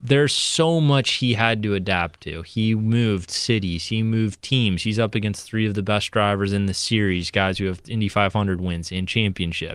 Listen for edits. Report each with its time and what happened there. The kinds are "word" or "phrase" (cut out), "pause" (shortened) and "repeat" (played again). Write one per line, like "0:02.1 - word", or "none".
none